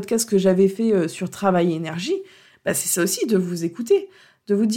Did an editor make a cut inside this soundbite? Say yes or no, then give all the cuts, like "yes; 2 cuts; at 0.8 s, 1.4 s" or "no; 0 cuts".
no; 0 cuts